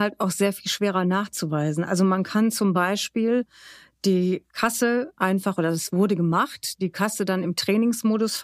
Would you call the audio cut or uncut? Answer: uncut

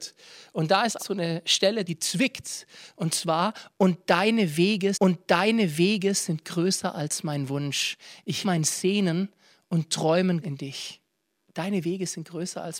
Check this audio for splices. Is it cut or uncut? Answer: cut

